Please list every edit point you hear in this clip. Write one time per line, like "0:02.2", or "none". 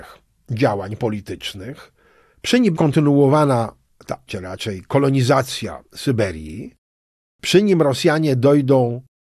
0:02.7
0:04.3